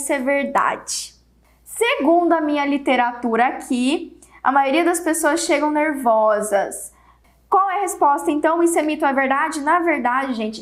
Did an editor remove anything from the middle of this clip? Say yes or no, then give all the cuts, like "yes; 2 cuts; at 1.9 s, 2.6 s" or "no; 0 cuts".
no; 0 cuts